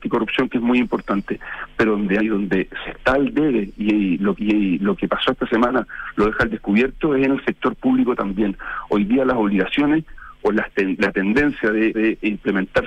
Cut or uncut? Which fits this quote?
cut